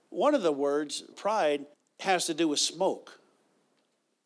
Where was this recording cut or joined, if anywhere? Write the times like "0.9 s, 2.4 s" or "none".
1.1 s, 1.7 s

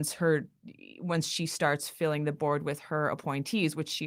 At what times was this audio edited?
none

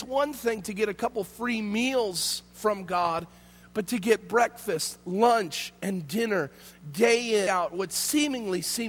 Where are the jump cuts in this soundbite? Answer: 7.5 s

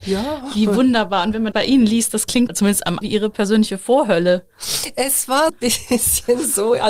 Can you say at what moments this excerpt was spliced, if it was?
1.5 s, 2.5 s, 3.0 s, 5.5 s

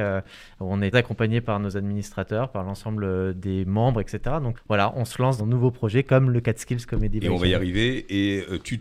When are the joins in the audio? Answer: 0.9 s, 4.5 s, 5.4 s

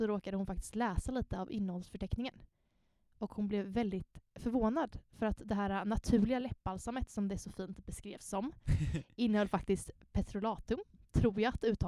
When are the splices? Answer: none

